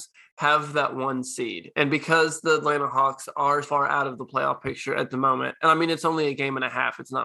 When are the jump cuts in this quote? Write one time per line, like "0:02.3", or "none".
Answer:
0:03.6